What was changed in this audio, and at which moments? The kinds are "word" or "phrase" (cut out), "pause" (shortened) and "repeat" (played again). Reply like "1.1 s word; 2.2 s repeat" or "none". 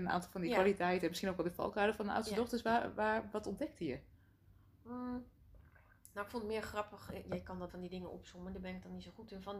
7.7 s word